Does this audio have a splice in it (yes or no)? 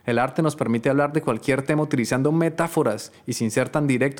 no